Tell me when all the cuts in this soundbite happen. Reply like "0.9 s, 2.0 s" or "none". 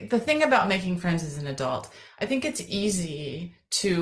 none